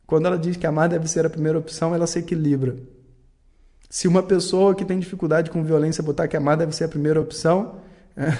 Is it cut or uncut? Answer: uncut